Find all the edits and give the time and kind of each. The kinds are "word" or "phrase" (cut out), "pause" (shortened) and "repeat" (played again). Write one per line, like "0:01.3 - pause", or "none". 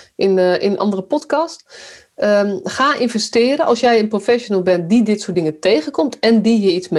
none